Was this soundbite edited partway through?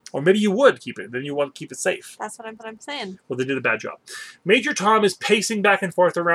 yes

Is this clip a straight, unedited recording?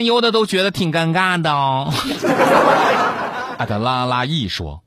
yes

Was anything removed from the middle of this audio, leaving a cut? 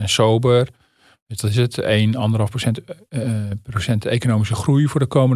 no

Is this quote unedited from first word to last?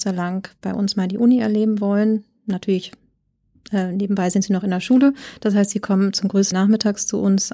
no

